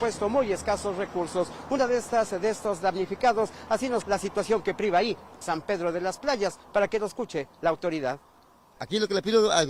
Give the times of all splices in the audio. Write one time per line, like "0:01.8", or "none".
0:04.0
0:05.4